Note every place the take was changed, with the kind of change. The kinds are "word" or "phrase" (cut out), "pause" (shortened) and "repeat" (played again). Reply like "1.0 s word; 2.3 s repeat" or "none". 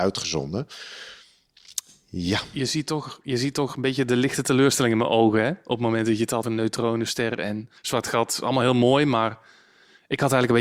6.4 s word; 7.8 s pause